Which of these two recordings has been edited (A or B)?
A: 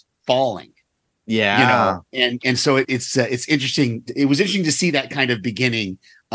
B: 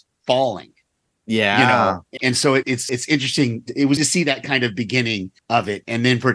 B